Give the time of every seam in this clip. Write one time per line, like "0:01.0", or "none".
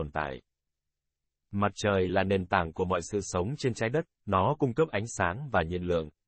none